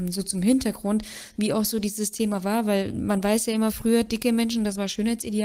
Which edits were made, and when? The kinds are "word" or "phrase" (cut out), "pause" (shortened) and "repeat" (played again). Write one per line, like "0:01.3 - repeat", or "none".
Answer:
none